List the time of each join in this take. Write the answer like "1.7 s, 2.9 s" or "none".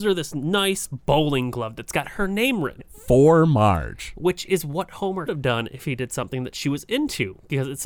2.8 s, 5.3 s